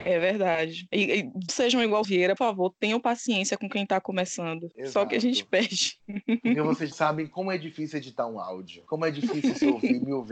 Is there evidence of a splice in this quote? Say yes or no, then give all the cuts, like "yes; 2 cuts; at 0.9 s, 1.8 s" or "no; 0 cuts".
yes; 4 cuts; at 1.5 s, 2.0 s, 2.4 s, 6.9 s